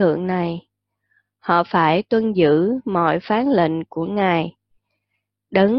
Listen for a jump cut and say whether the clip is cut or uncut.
uncut